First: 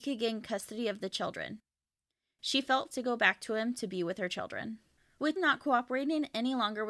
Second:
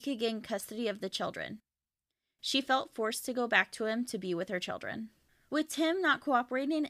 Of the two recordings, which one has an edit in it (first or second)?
first